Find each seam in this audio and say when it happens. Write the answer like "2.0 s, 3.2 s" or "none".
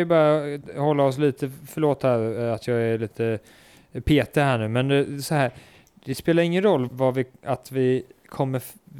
6.9 s